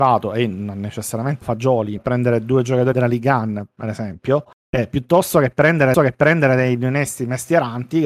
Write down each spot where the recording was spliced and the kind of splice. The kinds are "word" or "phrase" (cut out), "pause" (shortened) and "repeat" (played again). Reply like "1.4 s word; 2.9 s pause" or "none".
1.4 s word; 2.0 s phrase; 2.9 s word; 4.5 s pause; 5.9 s repeat